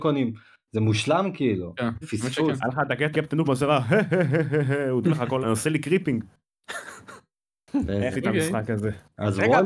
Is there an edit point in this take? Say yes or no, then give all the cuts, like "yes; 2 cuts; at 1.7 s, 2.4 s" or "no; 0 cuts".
yes; 6 cuts; at 2.0 s, 3.1 s, 3.4 s, 5.0 s, 5.4 s, 8.1 s